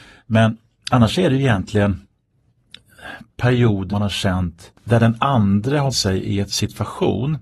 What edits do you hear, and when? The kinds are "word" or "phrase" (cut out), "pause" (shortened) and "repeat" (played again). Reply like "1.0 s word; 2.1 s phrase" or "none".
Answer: 3.9 s word; 5.9 s word; 6.5 s word